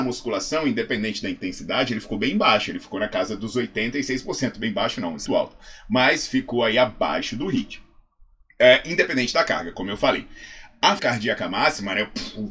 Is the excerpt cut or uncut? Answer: cut